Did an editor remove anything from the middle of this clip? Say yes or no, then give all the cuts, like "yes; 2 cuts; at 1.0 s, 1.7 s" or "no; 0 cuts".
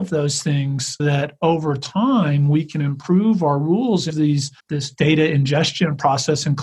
yes; 3 cuts; at 1.0 s, 4.1 s, 4.6 s